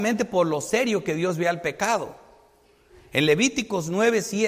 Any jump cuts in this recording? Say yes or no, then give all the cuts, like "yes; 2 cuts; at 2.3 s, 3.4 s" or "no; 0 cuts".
no; 0 cuts